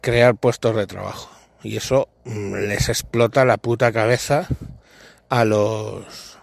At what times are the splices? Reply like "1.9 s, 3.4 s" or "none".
none